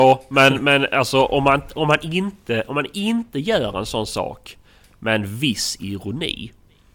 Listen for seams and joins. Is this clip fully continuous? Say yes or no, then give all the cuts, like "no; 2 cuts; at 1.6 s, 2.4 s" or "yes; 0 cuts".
yes; 0 cuts